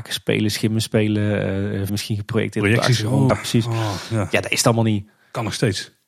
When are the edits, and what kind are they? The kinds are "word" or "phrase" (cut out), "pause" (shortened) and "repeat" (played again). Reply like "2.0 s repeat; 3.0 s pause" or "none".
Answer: 1.9 s word; 3.3 s word